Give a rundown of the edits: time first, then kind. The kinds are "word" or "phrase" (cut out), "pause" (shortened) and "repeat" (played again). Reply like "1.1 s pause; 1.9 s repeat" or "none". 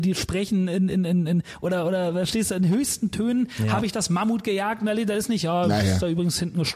none